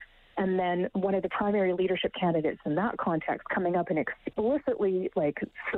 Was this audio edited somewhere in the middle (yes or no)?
no